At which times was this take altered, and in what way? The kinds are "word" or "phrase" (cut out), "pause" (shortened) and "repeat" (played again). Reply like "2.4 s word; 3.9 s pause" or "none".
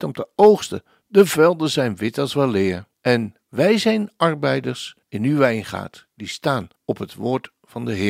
2.9 s pause; 5.0 s pause; 6.8 s pause